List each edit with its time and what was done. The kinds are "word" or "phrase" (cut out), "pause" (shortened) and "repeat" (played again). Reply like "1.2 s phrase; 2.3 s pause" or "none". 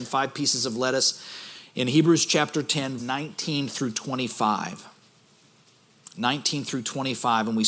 3.0 s word